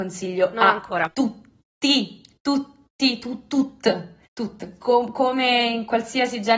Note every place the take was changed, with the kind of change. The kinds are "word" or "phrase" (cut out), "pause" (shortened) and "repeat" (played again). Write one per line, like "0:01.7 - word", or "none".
0:04.3 - pause